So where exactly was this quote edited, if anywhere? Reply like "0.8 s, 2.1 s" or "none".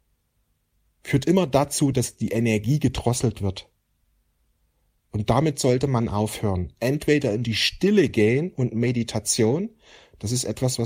none